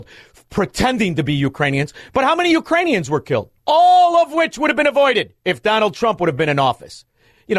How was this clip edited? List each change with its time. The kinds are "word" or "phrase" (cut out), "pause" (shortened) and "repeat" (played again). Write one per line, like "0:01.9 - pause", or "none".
0:03.6 - pause
0:05.4 - pause